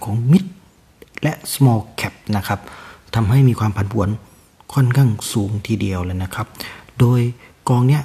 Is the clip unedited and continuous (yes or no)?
yes